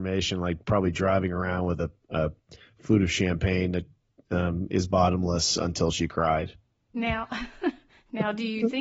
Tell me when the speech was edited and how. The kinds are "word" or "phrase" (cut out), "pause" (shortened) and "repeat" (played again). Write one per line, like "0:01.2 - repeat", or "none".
none